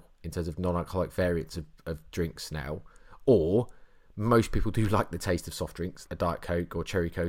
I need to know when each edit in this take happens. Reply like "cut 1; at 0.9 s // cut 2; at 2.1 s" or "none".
cut 1; at 6.1 s